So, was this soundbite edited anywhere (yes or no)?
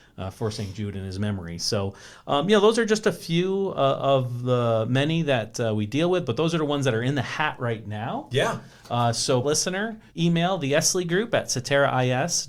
yes